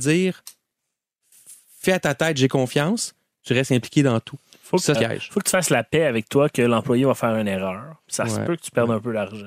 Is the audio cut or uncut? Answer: cut